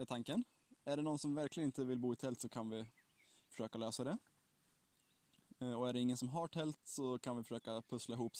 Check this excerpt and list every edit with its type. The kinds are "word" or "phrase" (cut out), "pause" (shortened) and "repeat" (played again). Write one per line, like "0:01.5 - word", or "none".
none